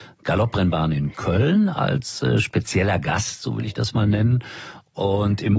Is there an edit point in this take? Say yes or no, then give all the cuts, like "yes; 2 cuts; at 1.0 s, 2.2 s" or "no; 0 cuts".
no; 0 cuts